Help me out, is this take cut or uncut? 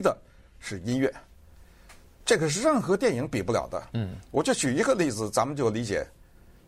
uncut